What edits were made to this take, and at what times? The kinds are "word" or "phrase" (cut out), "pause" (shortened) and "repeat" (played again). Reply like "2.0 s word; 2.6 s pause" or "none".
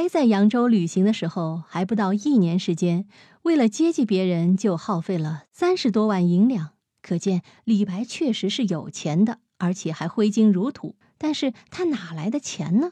11.0 s pause